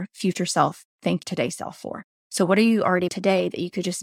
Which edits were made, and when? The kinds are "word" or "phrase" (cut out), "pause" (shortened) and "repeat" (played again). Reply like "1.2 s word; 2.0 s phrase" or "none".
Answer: 1.2 s word; 3.1 s word